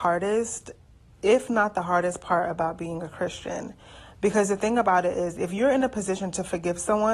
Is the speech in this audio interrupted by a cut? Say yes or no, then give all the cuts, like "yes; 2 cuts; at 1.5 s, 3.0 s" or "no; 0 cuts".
no; 0 cuts